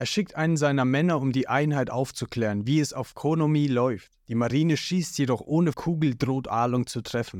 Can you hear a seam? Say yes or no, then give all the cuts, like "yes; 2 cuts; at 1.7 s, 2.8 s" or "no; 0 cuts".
yes; 1 cut; at 5.7 s